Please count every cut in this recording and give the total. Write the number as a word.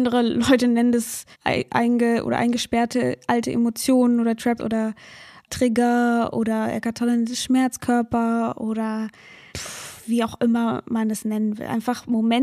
three